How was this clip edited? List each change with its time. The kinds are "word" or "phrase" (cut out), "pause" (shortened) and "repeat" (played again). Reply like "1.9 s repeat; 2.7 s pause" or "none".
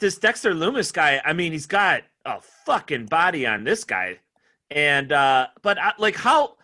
none